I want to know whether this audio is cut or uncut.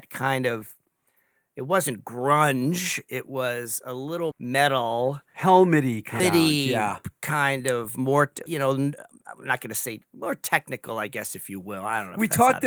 cut